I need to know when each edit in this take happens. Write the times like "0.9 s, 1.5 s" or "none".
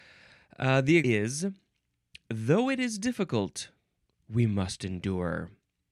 1.0 s